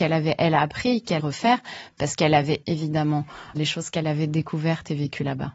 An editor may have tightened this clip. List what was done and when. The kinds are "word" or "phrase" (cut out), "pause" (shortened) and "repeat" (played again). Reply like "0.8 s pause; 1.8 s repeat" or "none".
1.2 s word; 2.6 s word; 3.5 s word